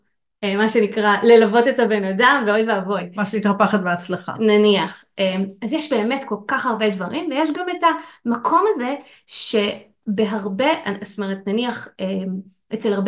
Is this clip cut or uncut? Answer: uncut